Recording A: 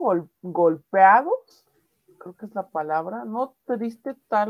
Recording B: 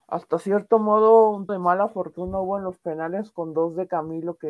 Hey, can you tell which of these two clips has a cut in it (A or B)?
B